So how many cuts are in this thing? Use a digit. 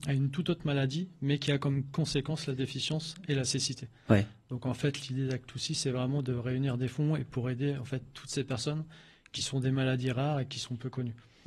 0